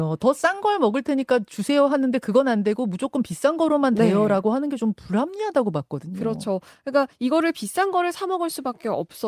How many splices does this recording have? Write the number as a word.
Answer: zero